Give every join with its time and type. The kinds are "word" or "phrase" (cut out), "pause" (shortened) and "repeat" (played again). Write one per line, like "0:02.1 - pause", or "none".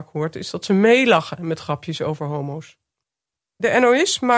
none